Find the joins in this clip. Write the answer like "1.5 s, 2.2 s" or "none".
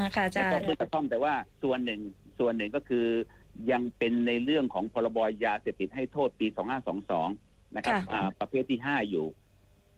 1.5 s